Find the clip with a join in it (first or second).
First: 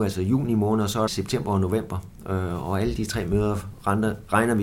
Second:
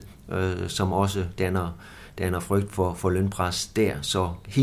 first